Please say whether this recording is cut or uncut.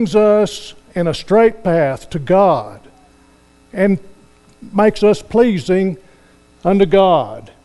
uncut